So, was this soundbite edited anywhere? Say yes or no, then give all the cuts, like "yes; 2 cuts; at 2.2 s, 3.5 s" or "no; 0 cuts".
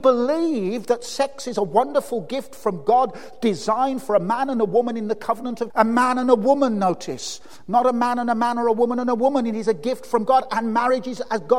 yes; 1 cut; at 5.7 s